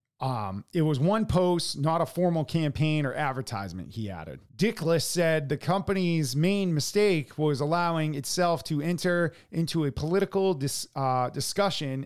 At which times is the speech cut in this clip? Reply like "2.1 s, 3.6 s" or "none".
4.5 s